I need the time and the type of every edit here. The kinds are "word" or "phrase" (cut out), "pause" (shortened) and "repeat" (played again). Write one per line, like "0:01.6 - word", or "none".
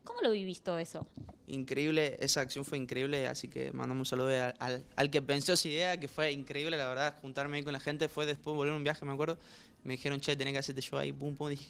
none